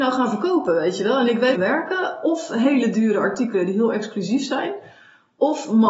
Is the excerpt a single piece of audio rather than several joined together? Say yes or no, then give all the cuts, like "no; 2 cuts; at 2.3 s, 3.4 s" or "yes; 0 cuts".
no; 1 cut; at 1.6 s